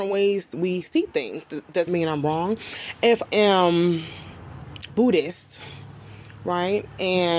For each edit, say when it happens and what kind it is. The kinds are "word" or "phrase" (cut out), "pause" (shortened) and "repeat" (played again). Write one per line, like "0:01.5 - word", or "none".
0:01.9 - word
0:03.3 - word